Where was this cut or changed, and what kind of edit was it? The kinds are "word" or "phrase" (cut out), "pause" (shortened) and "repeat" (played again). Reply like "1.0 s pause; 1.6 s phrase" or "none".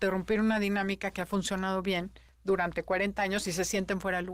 none